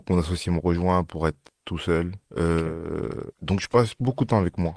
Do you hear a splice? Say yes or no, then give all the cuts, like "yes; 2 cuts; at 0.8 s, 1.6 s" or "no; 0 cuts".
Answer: yes; 2 cuts; at 2.2 s, 3.3 s